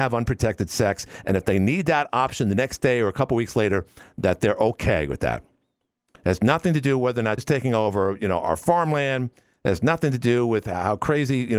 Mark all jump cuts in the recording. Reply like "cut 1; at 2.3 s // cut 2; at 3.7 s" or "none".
cut 1; at 7.4 s